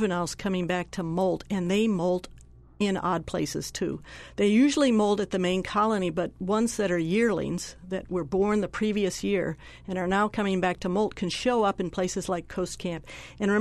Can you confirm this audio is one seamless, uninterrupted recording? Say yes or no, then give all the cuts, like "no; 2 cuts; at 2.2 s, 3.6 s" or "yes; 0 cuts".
yes; 0 cuts